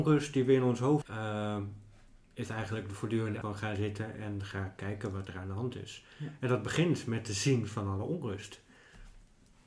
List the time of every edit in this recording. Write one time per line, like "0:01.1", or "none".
0:01.0
0:03.4